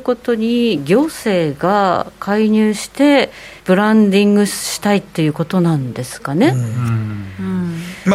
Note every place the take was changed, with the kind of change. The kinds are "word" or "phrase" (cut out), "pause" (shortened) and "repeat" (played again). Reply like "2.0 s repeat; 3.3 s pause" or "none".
3.6 s pause

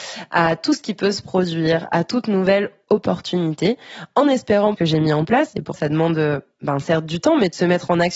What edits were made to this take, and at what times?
4.8 s phrase; 5.7 s word

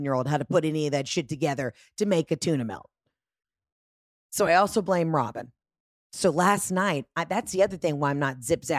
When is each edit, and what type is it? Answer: none

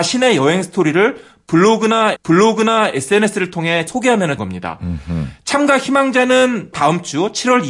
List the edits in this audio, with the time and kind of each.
2.2 s repeat; 3.9 s word; 4.4 s word; 6.7 s word

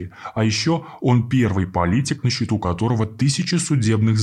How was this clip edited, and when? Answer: none

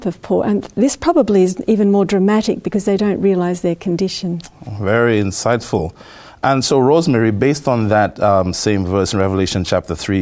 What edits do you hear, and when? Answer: none

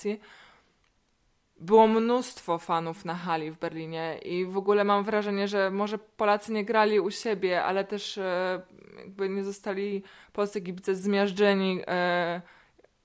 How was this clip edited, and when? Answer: none

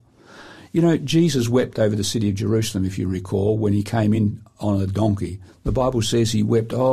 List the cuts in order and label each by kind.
none

